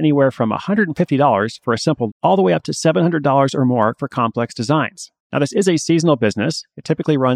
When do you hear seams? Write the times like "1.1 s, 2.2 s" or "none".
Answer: 2.1 s, 5.2 s